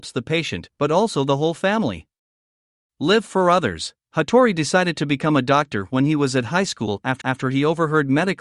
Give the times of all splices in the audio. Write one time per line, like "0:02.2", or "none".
0:04.0
0:07.2

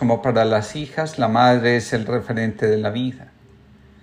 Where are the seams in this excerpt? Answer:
none

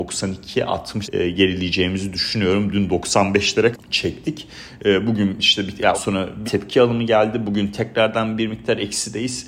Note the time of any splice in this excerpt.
0:01.0
0:03.7
0:05.9
0:06.4

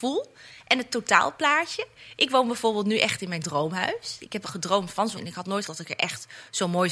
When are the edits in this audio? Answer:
0:04.4
0:05.2
0:05.7

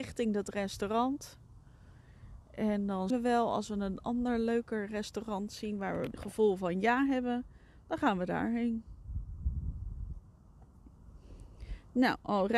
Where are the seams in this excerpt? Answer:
0:03.1
0:06.1

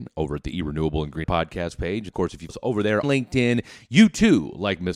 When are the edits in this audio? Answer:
0:01.2
0:02.1
0:02.5
0:03.0

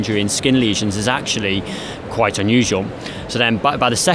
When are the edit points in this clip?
none

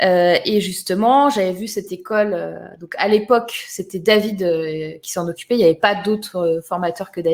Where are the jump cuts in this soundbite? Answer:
none

